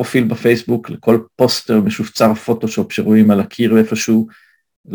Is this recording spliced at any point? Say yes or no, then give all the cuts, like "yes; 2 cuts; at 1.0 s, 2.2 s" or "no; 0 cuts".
no; 0 cuts